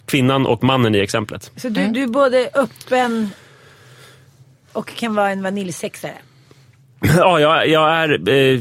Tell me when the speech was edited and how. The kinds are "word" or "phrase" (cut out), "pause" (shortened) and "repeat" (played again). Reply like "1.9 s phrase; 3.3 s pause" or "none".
none